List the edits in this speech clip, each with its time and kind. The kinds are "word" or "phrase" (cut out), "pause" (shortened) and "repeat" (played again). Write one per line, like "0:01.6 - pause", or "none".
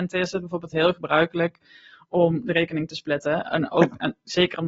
none